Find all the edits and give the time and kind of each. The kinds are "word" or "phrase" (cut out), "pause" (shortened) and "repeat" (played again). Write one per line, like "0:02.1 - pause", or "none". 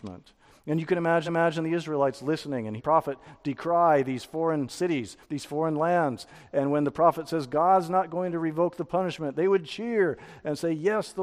0:01.3 - repeat
0:02.8 - phrase
0:05.2 - pause